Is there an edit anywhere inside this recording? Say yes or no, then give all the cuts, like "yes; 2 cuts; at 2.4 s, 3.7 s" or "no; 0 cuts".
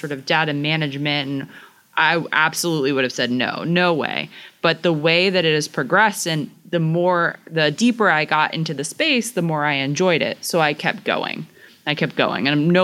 no; 0 cuts